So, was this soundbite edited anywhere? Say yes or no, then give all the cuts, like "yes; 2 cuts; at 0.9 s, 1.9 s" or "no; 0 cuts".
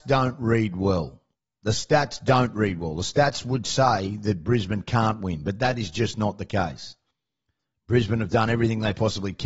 no; 0 cuts